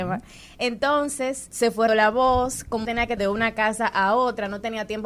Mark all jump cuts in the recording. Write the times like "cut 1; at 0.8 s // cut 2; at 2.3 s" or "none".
cut 1; at 1.5 s // cut 2; at 1.9 s // cut 3; at 2.9 s // cut 4; at 3.2 s